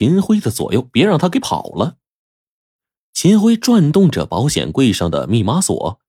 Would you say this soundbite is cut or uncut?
uncut